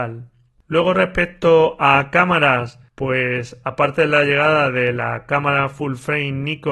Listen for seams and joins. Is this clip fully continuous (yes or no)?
yes